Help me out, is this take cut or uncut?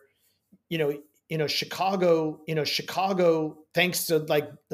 cut